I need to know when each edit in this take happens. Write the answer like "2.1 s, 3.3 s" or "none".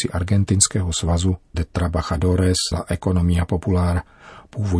1.5 s, 2.7 s